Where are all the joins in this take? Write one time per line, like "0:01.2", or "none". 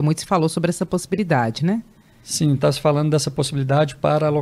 none